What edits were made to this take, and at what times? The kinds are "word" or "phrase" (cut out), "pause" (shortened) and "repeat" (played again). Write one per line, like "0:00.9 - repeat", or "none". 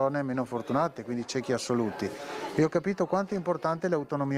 none